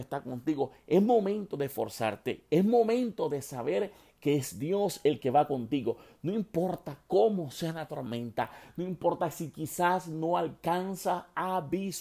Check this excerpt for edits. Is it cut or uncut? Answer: uncut